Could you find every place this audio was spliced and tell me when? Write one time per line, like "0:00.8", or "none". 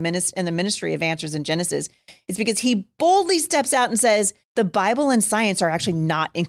0:04.4